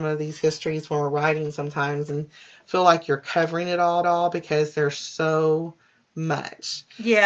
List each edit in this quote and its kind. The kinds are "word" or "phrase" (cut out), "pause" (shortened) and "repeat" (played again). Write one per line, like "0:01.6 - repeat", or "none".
0:04.0 - repeat

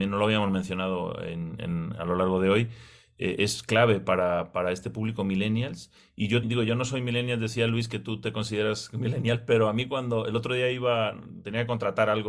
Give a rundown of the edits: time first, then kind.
0:06.4 - word

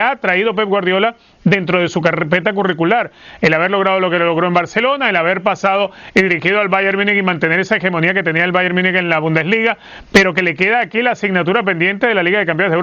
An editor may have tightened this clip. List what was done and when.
none

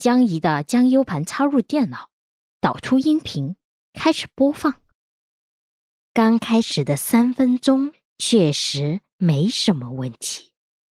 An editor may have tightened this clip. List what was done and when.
none

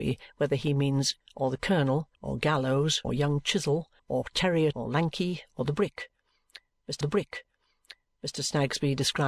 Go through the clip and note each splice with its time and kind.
0:01.2 - word
0:02.1 - pause
0:03.0 - word
0:04.0 - pause
0:04.7 - word
0:07.0 - repeat

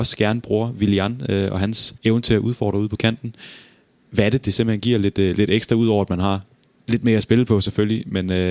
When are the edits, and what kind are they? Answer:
0:02.0 - pause

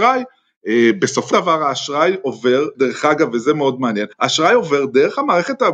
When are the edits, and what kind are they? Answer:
0:01.3 - word
0:02.7 - word
0:04.1 - pause

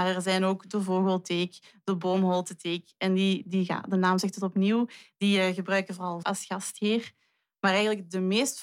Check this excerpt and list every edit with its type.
0:06.2 - word

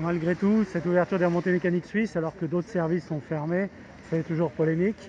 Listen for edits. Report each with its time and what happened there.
0:01.8 - word
0:04.0 - word

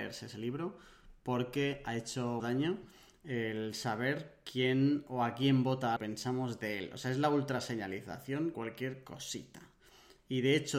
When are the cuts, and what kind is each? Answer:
0:02.4 - word
0:06.0 - phrase
0:08.5 - word

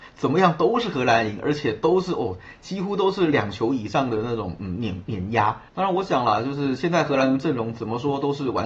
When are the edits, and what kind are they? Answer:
0:05.7 - pause

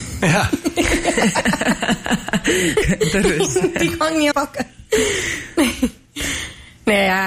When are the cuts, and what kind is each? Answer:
0:02.8 - phrase
0:04.3 - word

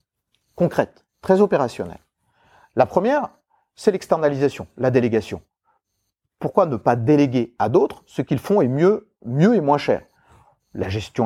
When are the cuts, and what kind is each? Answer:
none

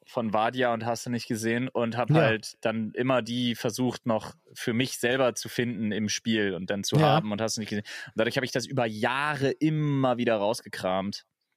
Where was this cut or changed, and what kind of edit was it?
none

